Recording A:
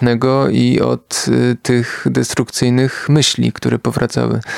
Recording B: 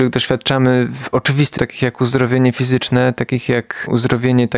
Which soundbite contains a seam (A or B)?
B